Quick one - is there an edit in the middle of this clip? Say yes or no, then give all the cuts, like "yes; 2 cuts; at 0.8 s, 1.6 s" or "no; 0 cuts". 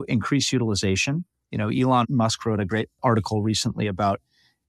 no; 0 cuts